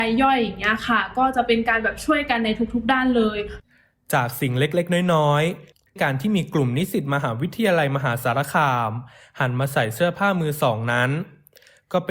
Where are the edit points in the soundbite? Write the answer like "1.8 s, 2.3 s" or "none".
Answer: 6.0 s